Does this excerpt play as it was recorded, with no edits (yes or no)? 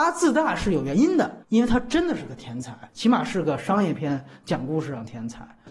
no